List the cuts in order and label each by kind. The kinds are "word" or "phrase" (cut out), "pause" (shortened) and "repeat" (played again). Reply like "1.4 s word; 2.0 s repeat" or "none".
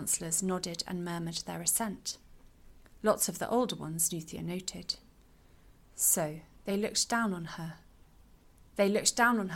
none